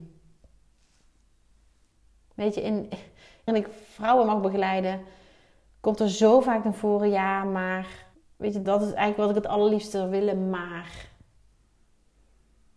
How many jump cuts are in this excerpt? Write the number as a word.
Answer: three